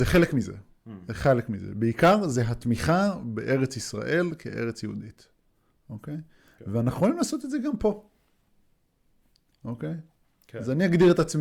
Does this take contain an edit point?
no; 0 cuts

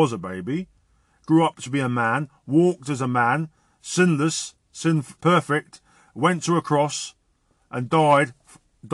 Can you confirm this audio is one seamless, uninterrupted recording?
no; 1 cut; at 5.2 s

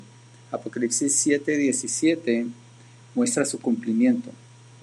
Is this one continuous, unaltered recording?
yes; 0 cuts

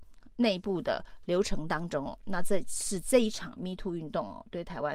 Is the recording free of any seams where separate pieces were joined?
yes; 0 cuts

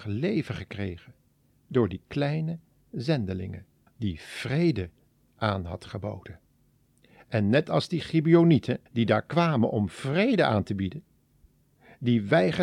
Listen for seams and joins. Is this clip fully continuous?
no; 2 cuts; at 3.9 s, 8.9 s

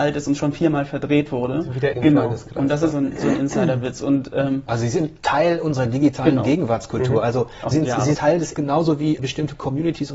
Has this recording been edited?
yes; 6 cuts; at 1.9 s, 2.9 s, 7.7 s, 8.1 s, 8.5 s, 9.2 s

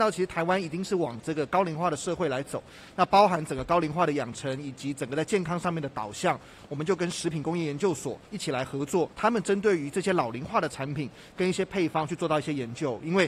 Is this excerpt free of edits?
no; 2 cuts; at 8.3 s, 9.1 s

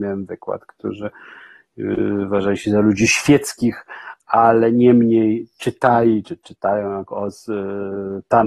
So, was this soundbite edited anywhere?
no; 0 cuts

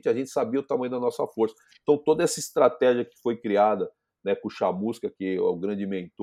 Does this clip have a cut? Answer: no; 0 cuts

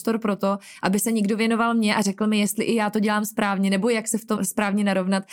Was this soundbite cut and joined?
yes; 1 cut; at 4.4 s

